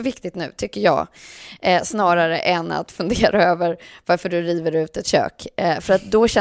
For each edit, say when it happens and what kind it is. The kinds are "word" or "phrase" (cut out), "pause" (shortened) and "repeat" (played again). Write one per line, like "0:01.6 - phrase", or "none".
none